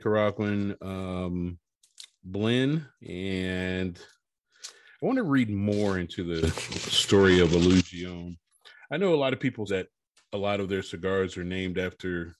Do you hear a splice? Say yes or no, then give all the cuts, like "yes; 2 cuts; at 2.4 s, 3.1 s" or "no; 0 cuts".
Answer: yes; 2 cuts; at 3.0 s, 9.7 s